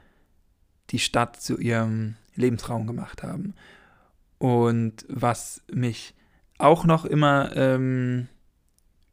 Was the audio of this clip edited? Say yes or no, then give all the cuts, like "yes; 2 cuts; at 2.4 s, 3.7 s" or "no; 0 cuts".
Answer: no; 0 cuts